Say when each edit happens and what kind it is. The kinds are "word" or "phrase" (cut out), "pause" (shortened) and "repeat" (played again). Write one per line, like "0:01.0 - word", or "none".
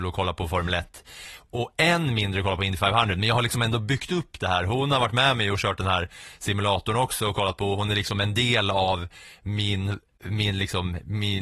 none